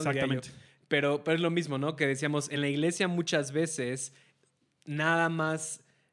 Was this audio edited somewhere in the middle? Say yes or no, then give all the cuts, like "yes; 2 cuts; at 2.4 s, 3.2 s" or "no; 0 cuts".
no; 0 cuts